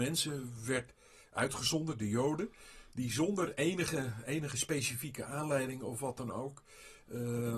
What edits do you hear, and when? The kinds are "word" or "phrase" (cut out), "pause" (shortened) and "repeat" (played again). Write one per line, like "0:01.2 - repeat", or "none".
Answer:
none

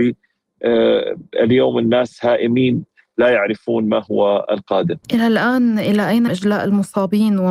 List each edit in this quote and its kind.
0:05.0 - pause
0:06.3 - word

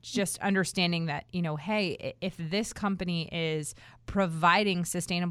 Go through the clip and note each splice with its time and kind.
none

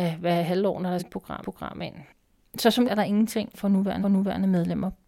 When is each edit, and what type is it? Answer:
0:01.0 - phrase
0:01.4 - repeat
0:02.8 - word
0:03.5 - word
0:04.0 - repeat

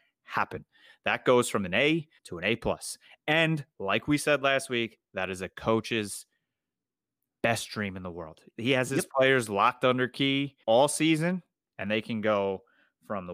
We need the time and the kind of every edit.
0:02.2 - pause
0:10.6 - pause

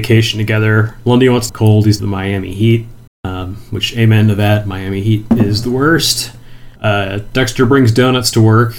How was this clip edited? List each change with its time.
0:01.5 - phrase
0:02.0 - phrase
0:03.1 - pause
0:06.8 - pause

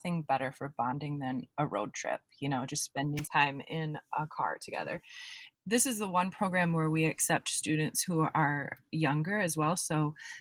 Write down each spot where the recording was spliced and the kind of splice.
0:03.2 - word

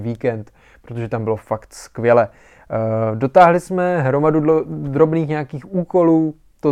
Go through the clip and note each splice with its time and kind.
none

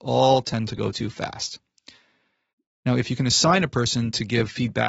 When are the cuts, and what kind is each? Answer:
none

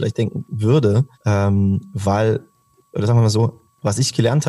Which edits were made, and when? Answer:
0:01.1 - pause
0:02.7 - pause

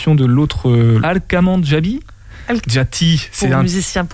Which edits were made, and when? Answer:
0:01.0 - phrase
0:02.6 - word

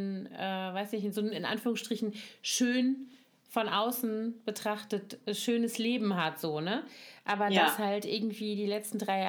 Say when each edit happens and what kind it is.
none

